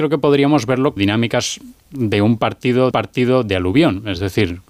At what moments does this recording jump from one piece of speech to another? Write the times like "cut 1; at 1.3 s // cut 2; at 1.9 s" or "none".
cut 1; at 1.0 s // cut 2; at 1.8 s // cut 3; at 2.9 s

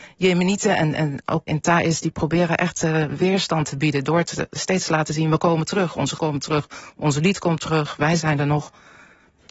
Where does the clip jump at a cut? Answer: cut 1; at 1.5 s // cut 2; at 6.2 s

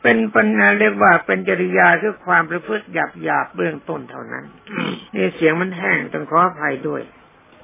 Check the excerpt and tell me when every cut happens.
cut 1; at 5.1 s

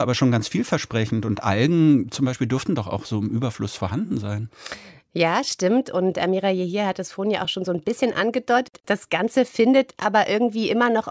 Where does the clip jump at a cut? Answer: none

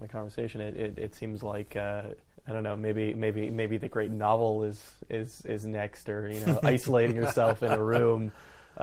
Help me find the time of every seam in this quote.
cut 1; at 2.3 s

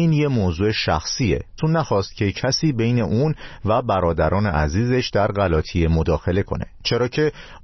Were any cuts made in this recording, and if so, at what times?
cut 1; at 1.6 s

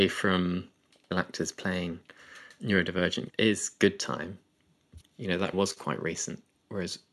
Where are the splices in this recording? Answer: cut 1; at 1.1 s // cut 2; at 2.6 s // cut 3; at 3.3 s // cut 4; at 5.0 s // cut 5; at 5.5 s

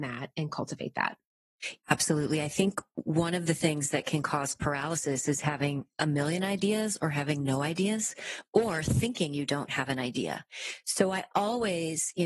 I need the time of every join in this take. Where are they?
cut 1; at 1.8 s

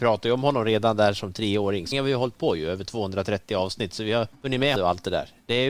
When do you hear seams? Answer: cut 1; at 1.9 s // cut 2; at 4.3 s // cut 3; at 4.8 s

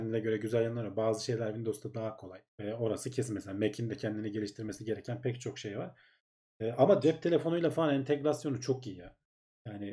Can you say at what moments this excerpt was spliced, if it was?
cut 1; at 2.5 s

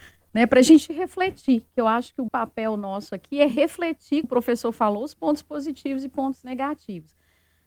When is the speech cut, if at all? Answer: cut 1; at 2.3 s // cut 2; at 4.2 s

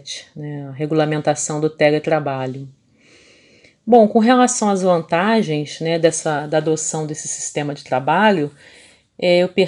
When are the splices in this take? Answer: none

